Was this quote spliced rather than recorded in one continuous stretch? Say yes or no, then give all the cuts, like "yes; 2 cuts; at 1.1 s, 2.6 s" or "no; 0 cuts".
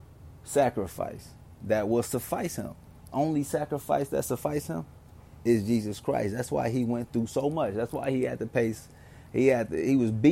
no; 0 cuts